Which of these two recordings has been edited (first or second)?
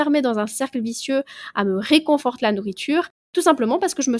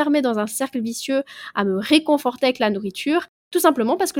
first